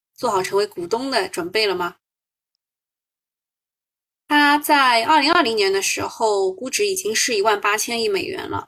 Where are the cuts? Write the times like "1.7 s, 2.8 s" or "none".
none